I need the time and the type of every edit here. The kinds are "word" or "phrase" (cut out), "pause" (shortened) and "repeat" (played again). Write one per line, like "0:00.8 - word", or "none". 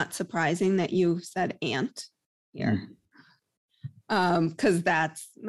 none